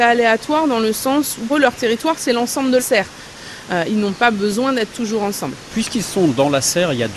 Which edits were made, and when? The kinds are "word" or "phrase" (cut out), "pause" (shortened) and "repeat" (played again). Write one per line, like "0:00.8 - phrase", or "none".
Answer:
0:01.5 - word
0:02.8 - word
0:04.9 - word